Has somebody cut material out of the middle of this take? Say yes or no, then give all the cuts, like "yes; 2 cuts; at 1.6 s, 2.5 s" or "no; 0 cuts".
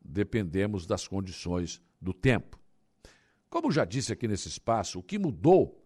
yes; 1 cut; at 1.9 s